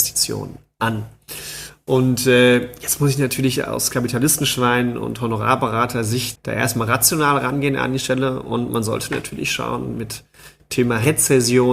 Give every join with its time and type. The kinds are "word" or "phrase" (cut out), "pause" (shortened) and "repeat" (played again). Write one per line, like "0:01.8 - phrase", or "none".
0:06.4 - word